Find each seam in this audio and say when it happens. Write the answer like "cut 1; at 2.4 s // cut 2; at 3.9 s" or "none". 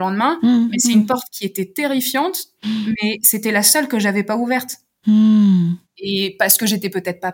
none